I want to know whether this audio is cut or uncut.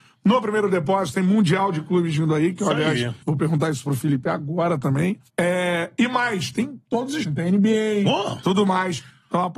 cut